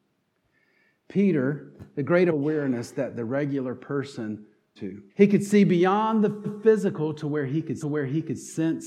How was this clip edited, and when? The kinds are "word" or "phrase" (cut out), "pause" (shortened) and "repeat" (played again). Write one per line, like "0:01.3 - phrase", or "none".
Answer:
0:02.3 - phrase
0:04.8 - phrase
0:05.1 - pause
0:06.4 - repeat
0:07.8 - repeat